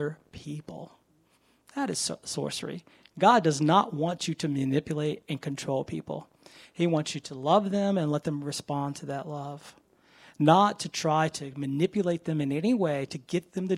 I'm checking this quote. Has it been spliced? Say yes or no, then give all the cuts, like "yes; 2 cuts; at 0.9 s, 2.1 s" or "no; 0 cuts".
no; 0 cuts